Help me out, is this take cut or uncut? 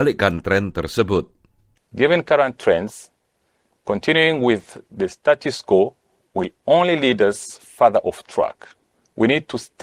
uncut